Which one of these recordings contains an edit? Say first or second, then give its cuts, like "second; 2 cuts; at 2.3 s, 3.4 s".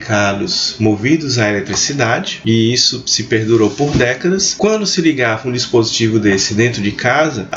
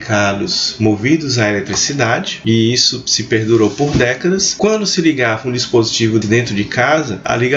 second; 1 cut; at 6.2 s